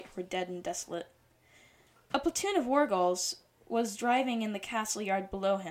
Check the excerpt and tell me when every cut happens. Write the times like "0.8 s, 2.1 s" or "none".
none